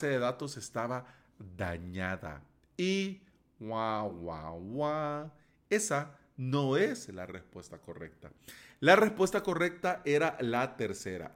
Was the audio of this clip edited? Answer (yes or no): no